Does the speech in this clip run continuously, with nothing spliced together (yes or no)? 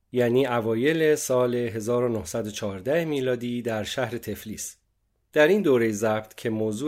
yes